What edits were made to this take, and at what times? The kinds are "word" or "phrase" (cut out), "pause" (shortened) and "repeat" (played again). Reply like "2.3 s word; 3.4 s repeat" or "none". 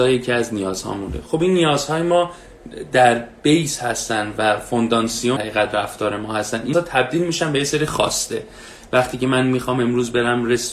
5.4 s word; 6.7 s word

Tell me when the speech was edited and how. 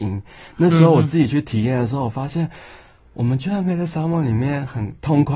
none

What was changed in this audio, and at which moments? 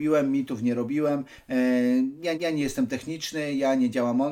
2.3 s repeat

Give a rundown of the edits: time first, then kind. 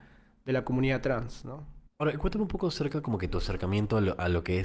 1.9 s pause

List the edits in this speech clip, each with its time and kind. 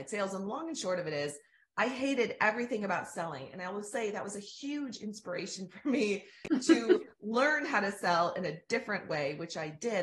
none

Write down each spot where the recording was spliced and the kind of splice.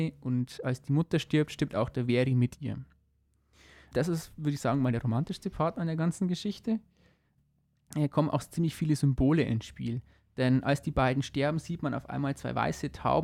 none

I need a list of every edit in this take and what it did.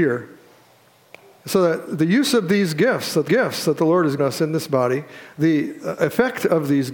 3.3 s repeat; 4.2 s word

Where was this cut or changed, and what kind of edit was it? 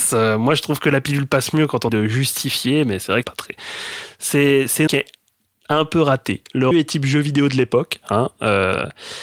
1.9 s word; 3.2 s word; 4.9 s phrase; 6.7 s word

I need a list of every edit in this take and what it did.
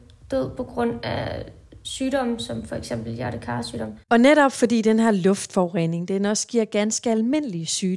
4.0 s pause

